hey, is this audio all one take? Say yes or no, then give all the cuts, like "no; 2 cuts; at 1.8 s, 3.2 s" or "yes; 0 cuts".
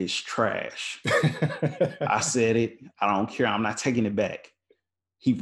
yes; 0 cuts